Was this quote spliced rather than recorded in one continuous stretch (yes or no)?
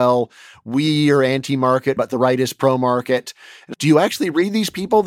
yes